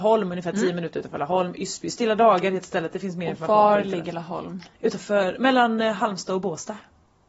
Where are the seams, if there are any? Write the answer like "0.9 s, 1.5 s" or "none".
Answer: 4.7 s

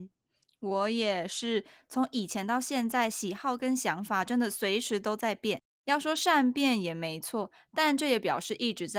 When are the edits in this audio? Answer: none

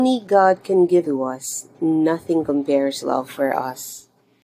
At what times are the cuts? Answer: 1.0 s, 1.7 s, 3.0 s

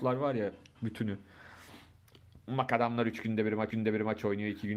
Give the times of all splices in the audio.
3.7 s

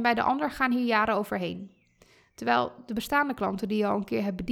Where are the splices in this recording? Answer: none

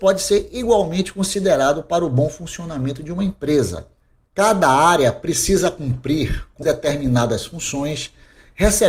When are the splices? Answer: 6.6 s

